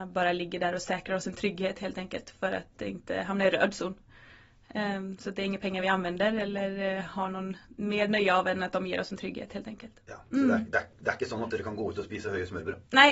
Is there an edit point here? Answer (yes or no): no